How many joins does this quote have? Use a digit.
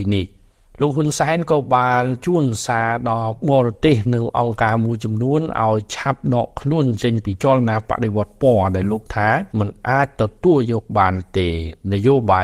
2